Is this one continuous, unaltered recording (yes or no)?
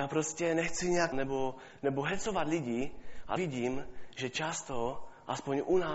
no